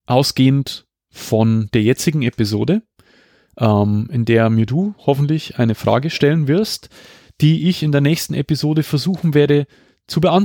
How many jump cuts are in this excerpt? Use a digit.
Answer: 0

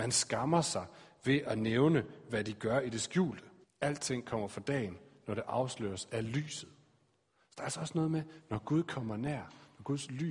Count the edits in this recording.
1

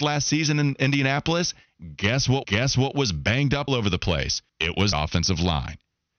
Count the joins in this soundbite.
4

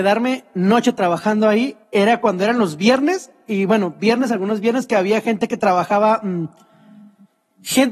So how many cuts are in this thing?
1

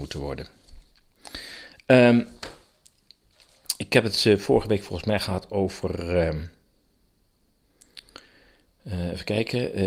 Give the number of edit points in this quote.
0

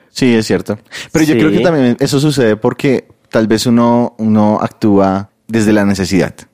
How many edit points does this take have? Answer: 0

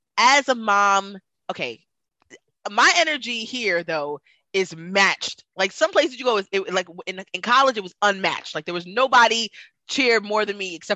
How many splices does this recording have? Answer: 0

